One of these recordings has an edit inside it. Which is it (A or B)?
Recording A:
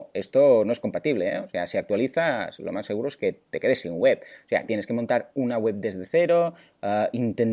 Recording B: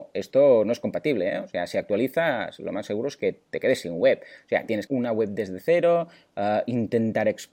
B